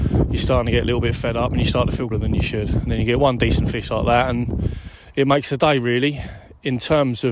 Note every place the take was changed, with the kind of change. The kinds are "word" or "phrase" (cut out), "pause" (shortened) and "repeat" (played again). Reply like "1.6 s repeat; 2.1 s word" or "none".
2.1 s word